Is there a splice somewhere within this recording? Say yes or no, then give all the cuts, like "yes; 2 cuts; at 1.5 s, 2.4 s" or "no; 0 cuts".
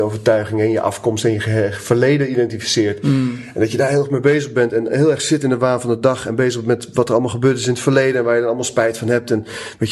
no; 0 cuts